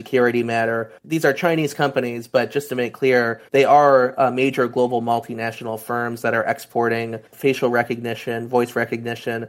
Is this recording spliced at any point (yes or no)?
yes